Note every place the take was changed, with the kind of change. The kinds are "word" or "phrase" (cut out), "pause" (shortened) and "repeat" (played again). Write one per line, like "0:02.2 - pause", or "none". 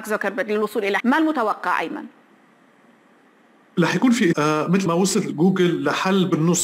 0:01.0 - word
0:04.3 - word
0:04.9 - word